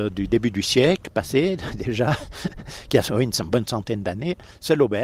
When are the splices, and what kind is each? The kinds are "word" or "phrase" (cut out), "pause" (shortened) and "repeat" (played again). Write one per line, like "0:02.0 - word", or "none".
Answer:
none